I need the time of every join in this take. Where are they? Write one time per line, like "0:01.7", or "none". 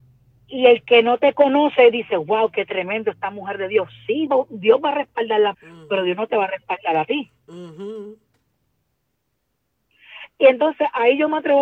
0:04.3
0:05.5